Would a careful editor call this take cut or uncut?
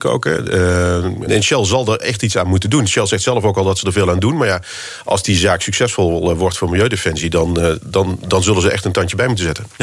cut